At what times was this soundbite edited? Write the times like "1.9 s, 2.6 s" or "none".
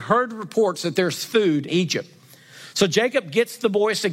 1.7 s